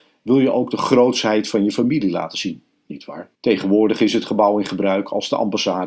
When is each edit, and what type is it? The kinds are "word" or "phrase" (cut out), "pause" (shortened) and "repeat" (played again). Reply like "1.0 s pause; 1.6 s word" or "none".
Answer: 3.3 s pause